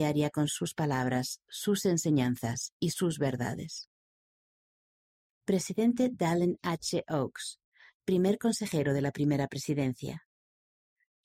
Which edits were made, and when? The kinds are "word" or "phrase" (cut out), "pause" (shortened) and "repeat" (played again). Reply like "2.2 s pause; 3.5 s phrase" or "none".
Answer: none